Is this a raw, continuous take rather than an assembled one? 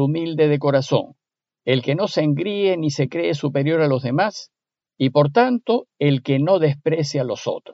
yes; 0 cuts

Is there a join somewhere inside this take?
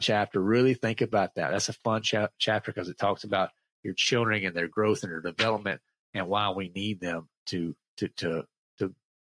no; 0 cuts

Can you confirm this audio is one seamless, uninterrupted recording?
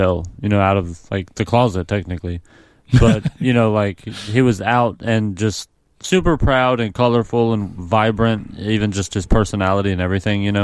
yes; 0 cuts

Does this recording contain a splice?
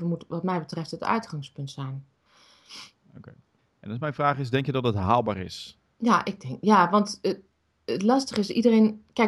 no; 0 cuts

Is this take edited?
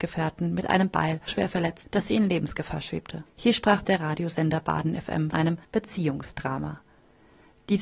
yes; 6 cuts; at 1.3 s, 1.8 s, 3.3 s, 3.8 s, 5.3 s, 5.6 s

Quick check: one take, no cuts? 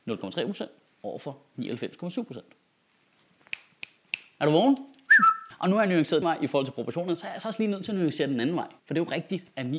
no; 2 cuts; at 6.2 s, 8.8 s

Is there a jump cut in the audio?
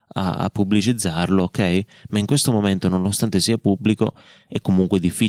no; 0 cuts

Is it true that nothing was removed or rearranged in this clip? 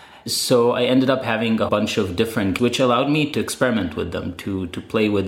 no; 2 cuts; at 1.7 s, 2.6 s

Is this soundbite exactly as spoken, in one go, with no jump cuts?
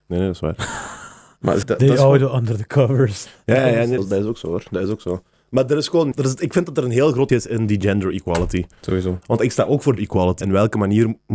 no; 6 cuts; at 1.6 s, 4.0 s, 6.1 s, 7.3 s, 10.0 s, 10.4 s

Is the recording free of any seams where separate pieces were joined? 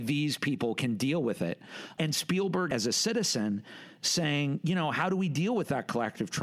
yes; 0 cuts

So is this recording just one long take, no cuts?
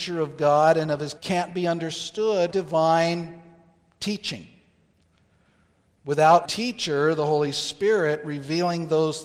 no; 3 cuts; at 1.2 s, 2.5 s, 6.4 s

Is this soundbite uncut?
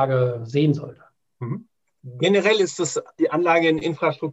yes; 0 cuts

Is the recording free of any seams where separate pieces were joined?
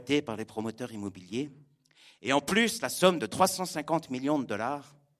yes; 0 cuts

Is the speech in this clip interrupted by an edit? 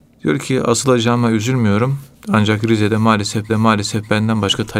yes; 2 cuts; at 2.2 s, 3.5 s

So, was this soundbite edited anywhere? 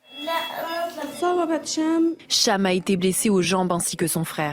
no; 0 cuts

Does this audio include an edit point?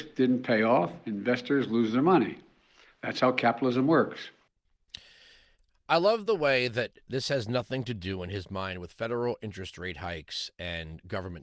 no; 0 cuts

